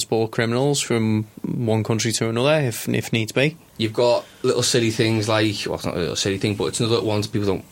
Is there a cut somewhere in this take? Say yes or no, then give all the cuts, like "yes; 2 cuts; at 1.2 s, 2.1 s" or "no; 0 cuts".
no; 0 cuts